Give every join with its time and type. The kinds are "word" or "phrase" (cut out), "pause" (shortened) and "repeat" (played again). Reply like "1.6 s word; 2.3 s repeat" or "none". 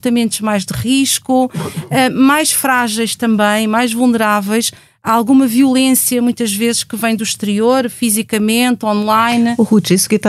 none